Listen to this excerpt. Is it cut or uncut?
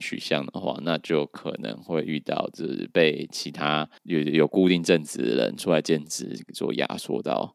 cut